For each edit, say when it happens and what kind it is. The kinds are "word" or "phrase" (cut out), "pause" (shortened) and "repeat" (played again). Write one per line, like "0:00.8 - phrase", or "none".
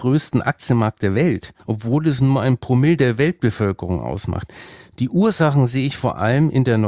0:01.6 - pause

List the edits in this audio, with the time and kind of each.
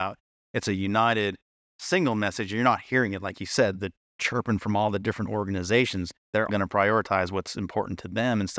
0:06.5 - word

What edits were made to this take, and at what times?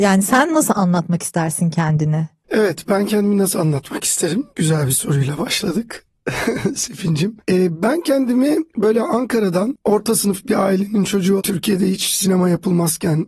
0:04.5 - pause
0:11.4 - word

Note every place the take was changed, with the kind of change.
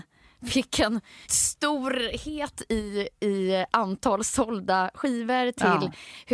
none

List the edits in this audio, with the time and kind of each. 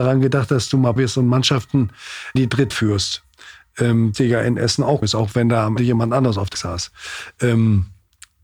0:01.0 - word
0:02.4 - word
0:02.7 - word
0:04.1 - word
0:05.0 - word
0:05.8 - word
0:06.5 - word

